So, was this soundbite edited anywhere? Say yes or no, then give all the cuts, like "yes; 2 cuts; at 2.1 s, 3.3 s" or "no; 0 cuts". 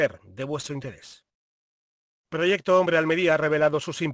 no; 0 cuts